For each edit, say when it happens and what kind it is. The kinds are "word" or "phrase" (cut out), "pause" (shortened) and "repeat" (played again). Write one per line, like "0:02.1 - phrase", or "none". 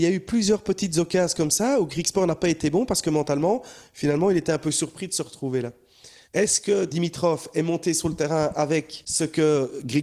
none

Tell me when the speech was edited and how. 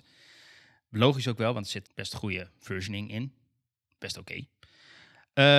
0:01.9 - word

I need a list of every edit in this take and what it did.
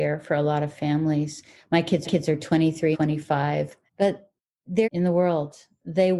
0:02.0 - repeat
0:02.9 - word
0:03.9 - pause
0:04.8 - word

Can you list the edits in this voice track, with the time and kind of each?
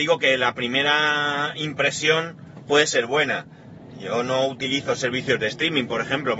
none

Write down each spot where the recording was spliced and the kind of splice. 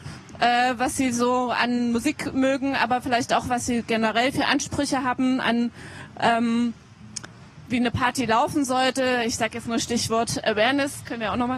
0:07.7 - word

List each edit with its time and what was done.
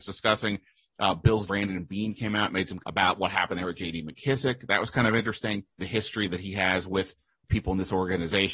0:01.5 - word
0:02.8 - word
0:05.8 - word

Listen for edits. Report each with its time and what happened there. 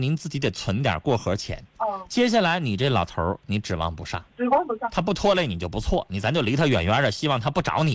0:01.7 - pause
0:04.3 - pause

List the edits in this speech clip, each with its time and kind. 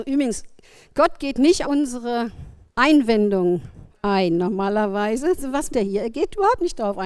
0:01.6 - word
0:02.7 - pause
0:05.7 - word

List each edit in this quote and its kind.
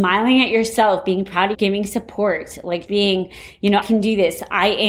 0:01.5 - word
0:02.9 - word
0:03.8 - word

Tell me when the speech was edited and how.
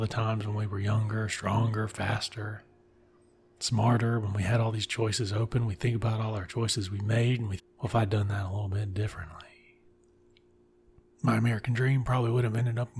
0:07.6 - word

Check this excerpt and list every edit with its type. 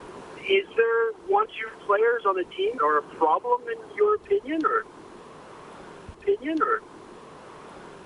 0:01.5 - word
0:02.8 - word
0:06.1 - repeat

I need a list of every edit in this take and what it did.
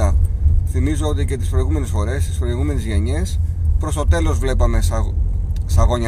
none

